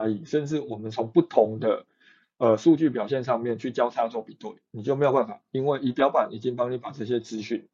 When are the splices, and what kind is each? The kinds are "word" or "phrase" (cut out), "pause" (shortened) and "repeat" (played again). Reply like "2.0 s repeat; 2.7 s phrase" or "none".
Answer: none

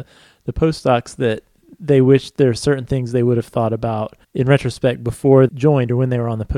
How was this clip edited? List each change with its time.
4.2 s pause; 5.5 s word

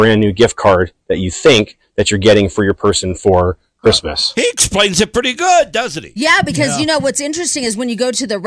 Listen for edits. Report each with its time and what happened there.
none

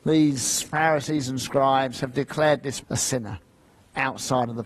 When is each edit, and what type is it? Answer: 2.8 s word

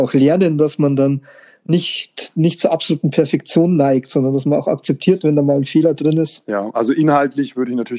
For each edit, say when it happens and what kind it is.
none

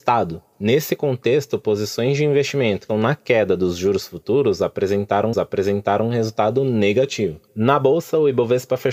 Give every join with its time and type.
2.9 s word; 5.3 s repeat

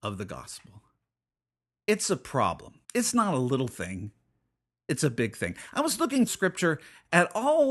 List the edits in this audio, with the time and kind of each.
2.8 s pause; 6.3 s word

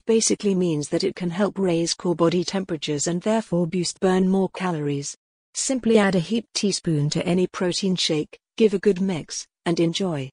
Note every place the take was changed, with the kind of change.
4.0 s phrase

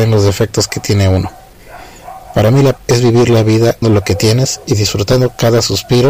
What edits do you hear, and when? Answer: 2.8 s word; 3.8 s word

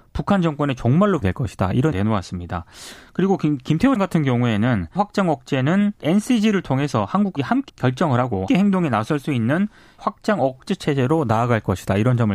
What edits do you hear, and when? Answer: 1.2 s word; 1.9 s word; 4.0 s word; 5.0 s word; 6.0 s word; 7.4 s word; 7.7 s word; 8.5 s word; 10.0 s word

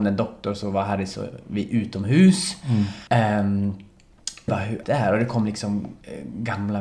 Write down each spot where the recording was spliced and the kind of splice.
3.1 s pause; 4.5 s phrase; 4.8 s word

